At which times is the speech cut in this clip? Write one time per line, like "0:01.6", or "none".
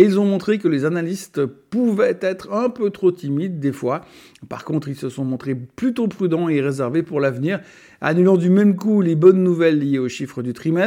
none